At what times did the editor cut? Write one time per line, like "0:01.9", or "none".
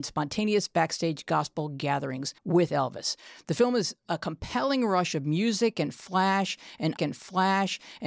0:02.4
0:07.0